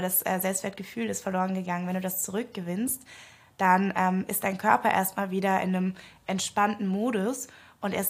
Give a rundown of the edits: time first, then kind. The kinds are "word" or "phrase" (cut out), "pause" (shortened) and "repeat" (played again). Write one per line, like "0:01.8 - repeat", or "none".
none